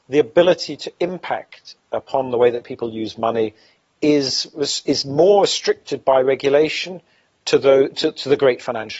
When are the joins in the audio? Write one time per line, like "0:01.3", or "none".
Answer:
none

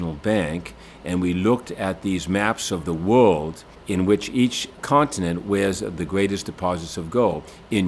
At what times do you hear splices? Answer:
none

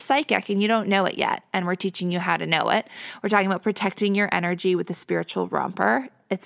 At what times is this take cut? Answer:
none

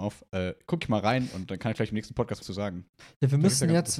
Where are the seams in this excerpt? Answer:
0:02.4

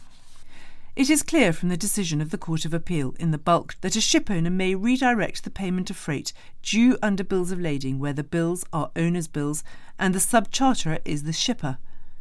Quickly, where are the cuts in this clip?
0:03.8

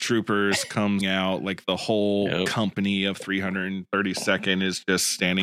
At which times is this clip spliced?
0:01.0

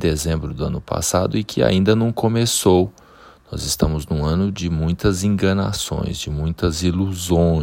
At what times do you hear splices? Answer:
none

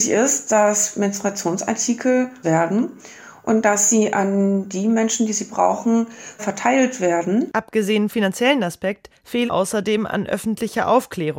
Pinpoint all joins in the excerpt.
0:02.4
0:06.4
0:08.1
0:09.5

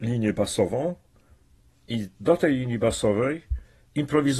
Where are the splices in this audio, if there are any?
0:02.1

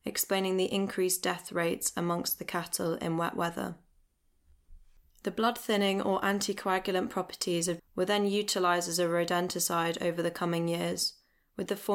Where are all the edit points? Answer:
0:07.8

